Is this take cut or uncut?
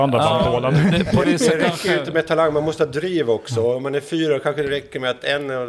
cut